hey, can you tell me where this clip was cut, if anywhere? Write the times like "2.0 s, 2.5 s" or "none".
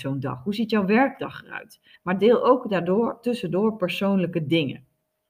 2.0 s

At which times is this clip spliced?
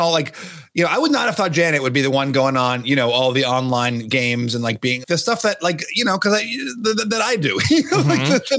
5.0 s

